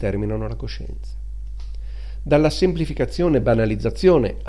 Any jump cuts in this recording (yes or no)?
no